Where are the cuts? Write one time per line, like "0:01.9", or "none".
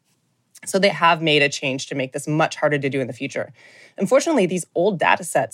0:00.9

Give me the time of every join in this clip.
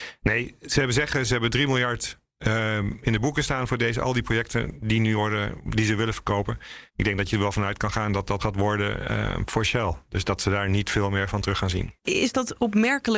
0:06.9
0:08.4
0:12.0

